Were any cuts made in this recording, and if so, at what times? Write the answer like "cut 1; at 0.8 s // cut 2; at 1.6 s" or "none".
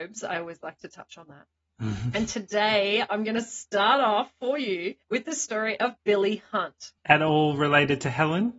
cut 1; at 5.0 s // cut 2; at 6.0 s // cut 3; at 7.0 s